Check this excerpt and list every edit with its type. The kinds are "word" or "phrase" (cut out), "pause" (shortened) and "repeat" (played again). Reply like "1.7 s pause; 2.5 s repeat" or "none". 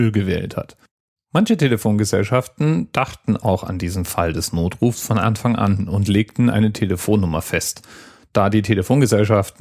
none